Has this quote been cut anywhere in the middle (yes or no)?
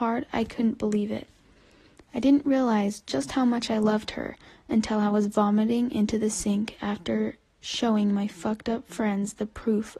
no